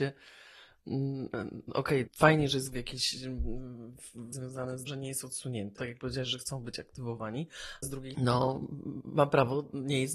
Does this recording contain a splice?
yes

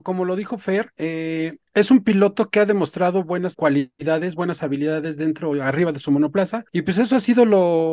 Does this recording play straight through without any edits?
no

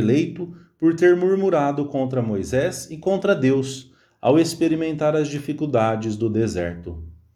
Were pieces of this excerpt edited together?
no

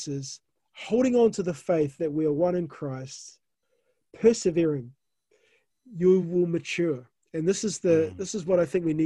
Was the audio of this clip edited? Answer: no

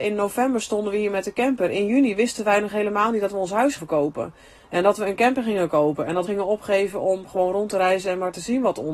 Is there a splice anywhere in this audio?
yes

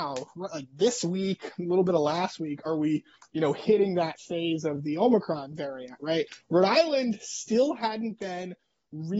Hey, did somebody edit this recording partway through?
no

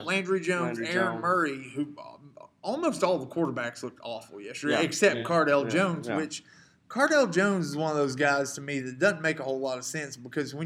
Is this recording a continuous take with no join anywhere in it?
yes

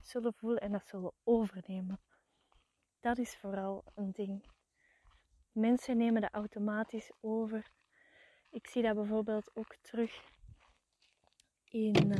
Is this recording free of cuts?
yes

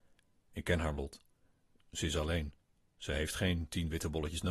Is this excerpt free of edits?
no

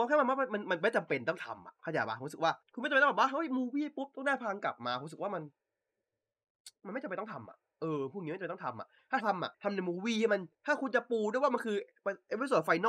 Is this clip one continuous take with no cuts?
no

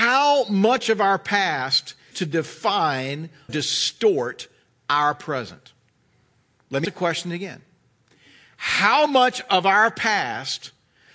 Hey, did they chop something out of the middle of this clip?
yes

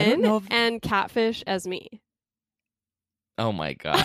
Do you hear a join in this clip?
no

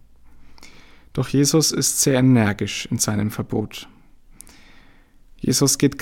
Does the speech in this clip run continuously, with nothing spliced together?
yes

